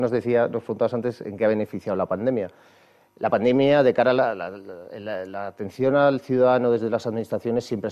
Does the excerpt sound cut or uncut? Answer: uncut